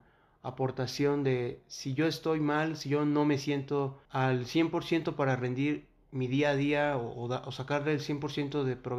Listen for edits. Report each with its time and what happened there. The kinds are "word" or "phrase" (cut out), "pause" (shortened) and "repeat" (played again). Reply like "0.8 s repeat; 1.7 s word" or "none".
4.0 s pause